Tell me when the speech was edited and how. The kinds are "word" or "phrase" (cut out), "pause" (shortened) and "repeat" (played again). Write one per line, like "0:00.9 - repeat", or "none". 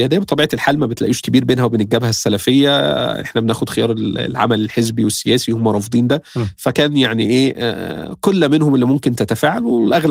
0:01.2 - word